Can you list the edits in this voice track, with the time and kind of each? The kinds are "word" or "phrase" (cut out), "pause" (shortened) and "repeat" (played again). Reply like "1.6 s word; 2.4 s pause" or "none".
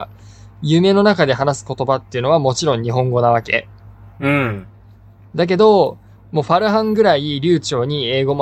none